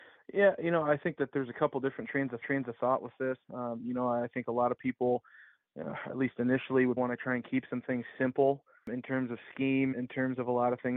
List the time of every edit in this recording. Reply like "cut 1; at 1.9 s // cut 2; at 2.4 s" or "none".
cut 1; at 2.4 s // cut 2; at 3.4 s // cut 3; at 7.0 s // cut 4; at 9.9 s